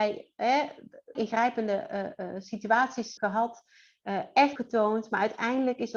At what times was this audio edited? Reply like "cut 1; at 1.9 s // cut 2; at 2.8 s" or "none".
cut 1; at 1.1 s // cut 2; at 3.2 s // cut 3; at 4.6 s